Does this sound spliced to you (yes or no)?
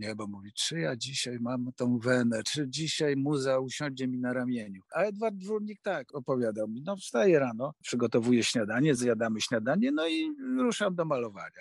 no